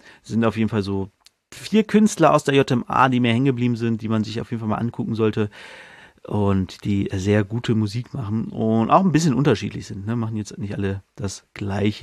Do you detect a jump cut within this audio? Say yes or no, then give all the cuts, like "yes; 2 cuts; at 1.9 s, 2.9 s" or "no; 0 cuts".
no; 0 cuts